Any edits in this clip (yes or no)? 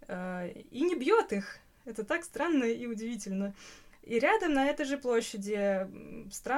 no